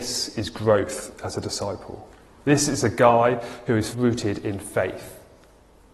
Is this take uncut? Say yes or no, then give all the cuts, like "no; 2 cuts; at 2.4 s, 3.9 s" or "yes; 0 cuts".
no; 1 cut; at 3.9 s